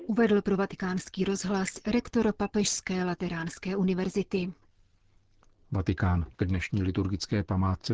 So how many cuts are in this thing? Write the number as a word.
one